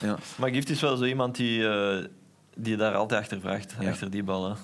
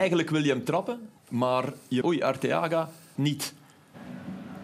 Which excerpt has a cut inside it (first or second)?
second